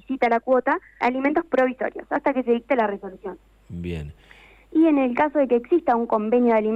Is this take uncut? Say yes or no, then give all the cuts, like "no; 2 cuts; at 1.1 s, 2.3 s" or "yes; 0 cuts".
no; 1 cut; at 1.0 s